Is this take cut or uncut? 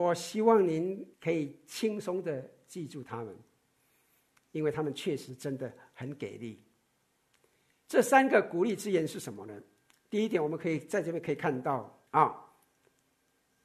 cut